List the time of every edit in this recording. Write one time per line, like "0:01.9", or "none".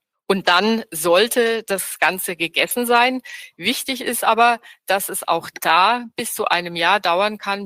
none